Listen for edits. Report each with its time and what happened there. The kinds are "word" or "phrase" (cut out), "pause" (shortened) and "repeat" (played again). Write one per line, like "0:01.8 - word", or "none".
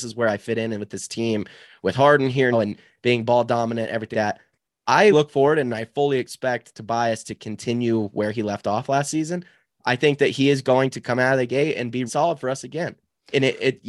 0:02.5 - word
0:04.1 - word
0:05.1 - word
0:12.1 - word